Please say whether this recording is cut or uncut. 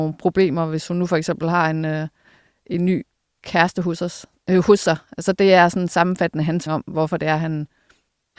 cut